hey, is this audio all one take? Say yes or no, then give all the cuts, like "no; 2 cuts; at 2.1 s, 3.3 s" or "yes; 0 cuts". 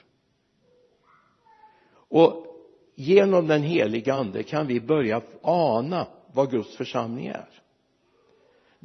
yes; 0 cuts